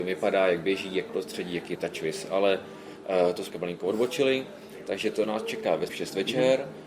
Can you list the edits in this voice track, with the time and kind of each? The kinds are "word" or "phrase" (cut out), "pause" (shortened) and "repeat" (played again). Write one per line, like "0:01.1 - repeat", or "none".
0:01.1 - word
0:01.8 - word
0:03.5 - word
0:05.9 - word